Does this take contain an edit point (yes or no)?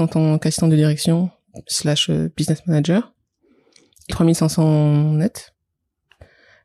yes